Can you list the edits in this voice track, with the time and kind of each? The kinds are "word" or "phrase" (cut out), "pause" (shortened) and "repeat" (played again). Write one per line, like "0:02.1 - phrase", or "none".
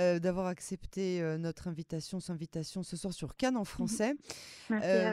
0:02.3 - repeat